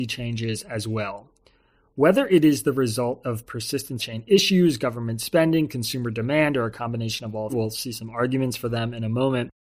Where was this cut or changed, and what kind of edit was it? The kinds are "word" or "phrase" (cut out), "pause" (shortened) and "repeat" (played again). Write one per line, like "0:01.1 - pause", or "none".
0:04.0 - word
0:07.5 - word